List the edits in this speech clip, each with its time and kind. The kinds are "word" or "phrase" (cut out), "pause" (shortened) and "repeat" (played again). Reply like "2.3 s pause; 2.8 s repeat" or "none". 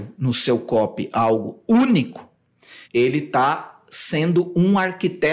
2.8 s pause